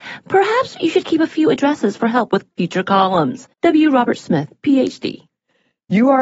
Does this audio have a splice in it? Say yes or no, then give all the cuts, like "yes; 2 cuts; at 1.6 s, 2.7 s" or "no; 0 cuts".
yes; 2 cuts; at 2.5 s, 3.5 s